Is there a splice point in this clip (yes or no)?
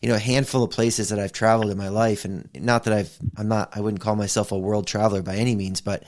no